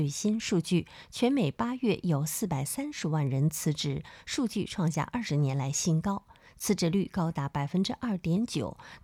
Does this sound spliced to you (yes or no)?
no